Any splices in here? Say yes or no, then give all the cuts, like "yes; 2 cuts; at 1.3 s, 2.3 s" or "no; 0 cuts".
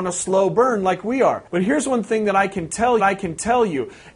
yes; 2 cuts; at 1.5 s, 3.0 s